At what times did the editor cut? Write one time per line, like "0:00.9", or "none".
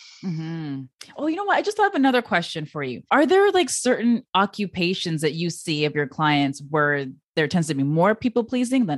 0:03.1

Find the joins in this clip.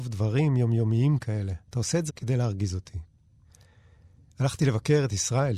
0:01.6
0:02.1

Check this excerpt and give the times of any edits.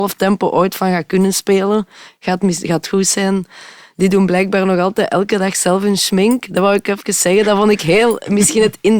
none

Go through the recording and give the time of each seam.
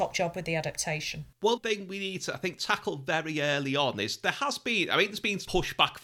0:01.6

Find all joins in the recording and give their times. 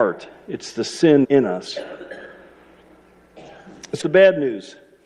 0:01.2
0:04.0

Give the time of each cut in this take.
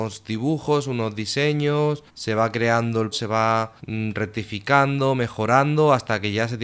0:02.1
0:03.1
0:03.8

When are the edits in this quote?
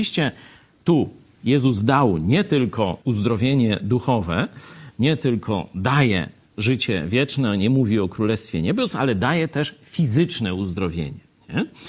0:03.0

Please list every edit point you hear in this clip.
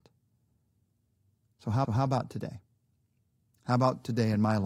0:01.8

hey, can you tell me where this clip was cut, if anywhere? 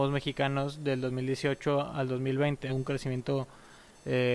0:02.7

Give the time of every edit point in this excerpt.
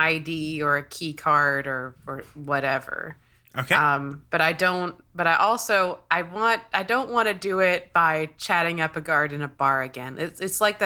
none

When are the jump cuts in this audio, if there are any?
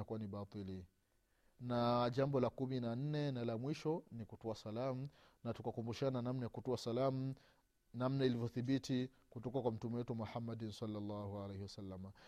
none

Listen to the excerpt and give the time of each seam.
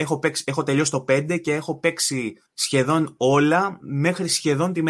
0:02.5

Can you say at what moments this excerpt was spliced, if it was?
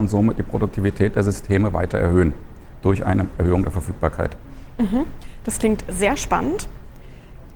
none

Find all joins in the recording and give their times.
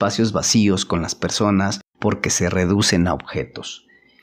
0:01.9

